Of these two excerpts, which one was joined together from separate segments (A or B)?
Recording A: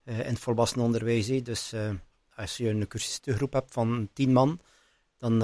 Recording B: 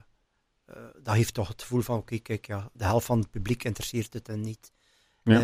B